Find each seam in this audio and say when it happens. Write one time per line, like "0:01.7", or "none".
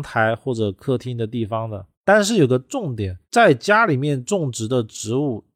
0:01.9
0:03.2